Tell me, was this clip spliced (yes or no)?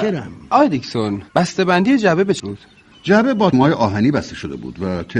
yes